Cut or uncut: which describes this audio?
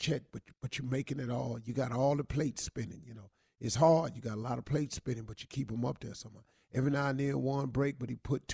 uncut